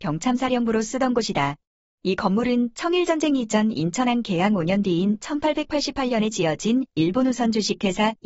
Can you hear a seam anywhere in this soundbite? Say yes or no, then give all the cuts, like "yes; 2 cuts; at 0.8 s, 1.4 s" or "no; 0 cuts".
no; 0 cuts